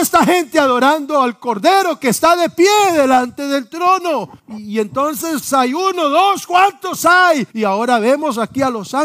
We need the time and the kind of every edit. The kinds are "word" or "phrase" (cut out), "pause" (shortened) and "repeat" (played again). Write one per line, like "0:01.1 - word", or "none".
0:04.4 - pause
0:07.5 - pause